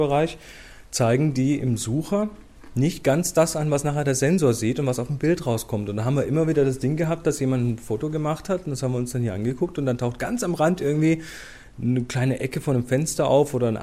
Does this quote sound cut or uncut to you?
uncut